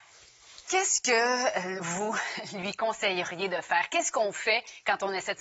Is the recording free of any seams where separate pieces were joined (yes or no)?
yes